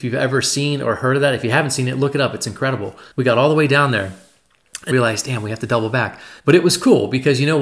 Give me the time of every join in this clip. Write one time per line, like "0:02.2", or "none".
0:03.1
0:04.9
0:06.4